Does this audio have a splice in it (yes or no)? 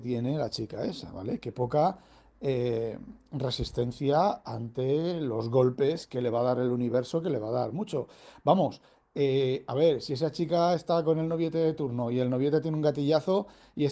no